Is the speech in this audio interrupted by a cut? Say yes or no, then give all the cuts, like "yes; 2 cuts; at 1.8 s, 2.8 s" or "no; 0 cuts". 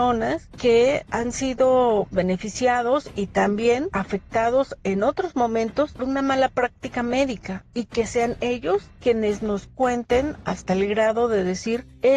yes; 3 cuts; at 2.1 s, 3.9 s, 6.0 s